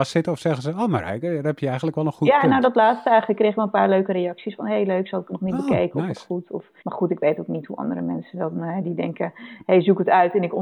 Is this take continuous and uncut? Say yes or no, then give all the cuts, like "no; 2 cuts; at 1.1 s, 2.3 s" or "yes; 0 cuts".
no; 1 cut; at 6.8 s